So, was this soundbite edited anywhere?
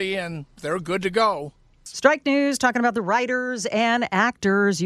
no; 0 cuts

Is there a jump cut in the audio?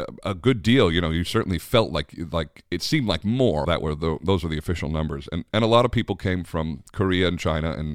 yes; 1 cut; at 3.6 s

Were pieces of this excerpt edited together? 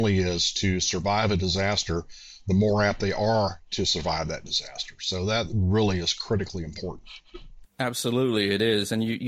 no; 0 cuts

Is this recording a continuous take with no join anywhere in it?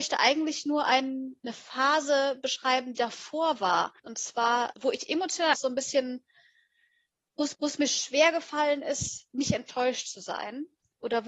no; 6 cuts; at 1.4 s, 3.0 s, 4.0 s, 4.7 s, 5.5 s, 7.5 s

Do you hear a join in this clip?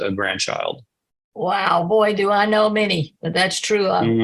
no; 0 cuts

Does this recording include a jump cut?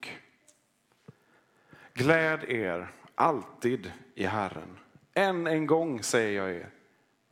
no; 0 cuts

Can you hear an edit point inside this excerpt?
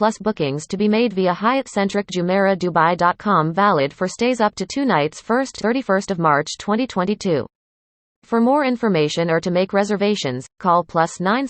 yes; 3 cuts; at 5.2 s, 5.6 s, 10.6 s

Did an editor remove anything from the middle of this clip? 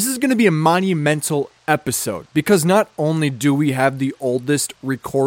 yes; 1 cut; at 1.6 s

